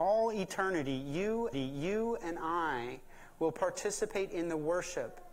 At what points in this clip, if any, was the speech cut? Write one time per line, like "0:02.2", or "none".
0:01.5

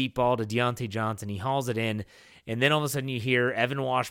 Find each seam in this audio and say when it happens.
none

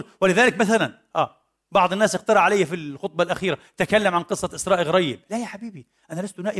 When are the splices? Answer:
none

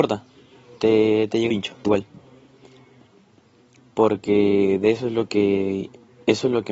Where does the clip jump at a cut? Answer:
0:01.5
0:01.8

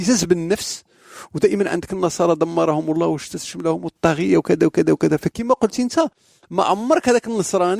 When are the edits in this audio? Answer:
none

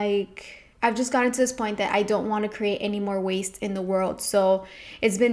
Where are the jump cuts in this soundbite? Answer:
none

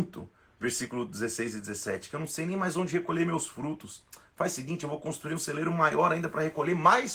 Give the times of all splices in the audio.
none

